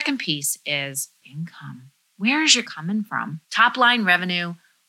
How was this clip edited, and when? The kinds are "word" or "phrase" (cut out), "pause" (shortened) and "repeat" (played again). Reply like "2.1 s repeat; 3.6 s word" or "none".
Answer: 1.2 s phrase; 2.0 s pause; 2.6 s word; 3.4 s pause